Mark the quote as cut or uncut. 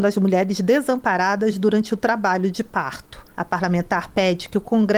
cut